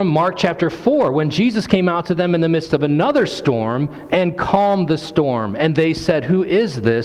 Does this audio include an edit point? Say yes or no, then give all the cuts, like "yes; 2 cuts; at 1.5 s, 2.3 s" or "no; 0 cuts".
no; 0 cuts